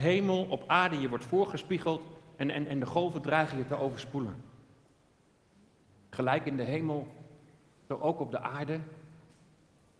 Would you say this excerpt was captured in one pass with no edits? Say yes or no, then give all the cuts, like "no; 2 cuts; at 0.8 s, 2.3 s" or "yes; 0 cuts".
yes; 0 cuts